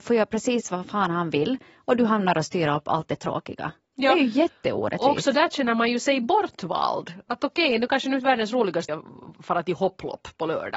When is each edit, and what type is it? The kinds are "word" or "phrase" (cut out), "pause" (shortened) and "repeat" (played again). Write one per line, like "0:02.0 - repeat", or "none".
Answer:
0:08.9 - word